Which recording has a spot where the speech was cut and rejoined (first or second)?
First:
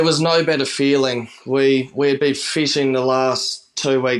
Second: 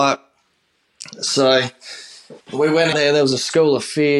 second